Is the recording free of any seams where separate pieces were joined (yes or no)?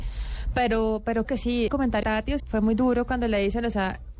no